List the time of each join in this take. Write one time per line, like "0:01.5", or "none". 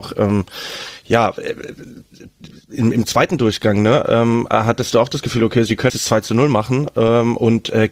0:05.9